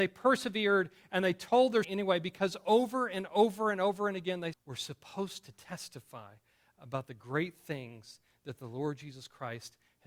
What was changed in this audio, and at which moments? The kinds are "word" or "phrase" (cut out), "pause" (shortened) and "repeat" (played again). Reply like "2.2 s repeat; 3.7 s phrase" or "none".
1.8 s word; 4.5 s word